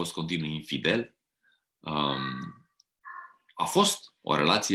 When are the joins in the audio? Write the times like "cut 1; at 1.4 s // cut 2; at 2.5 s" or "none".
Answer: none